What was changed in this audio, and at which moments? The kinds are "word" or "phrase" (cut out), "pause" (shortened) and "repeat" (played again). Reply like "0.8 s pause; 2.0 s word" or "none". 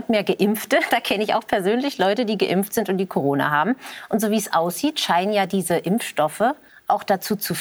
6.7 s pause